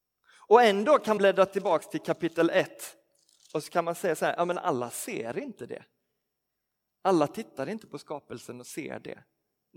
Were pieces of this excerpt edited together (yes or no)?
yes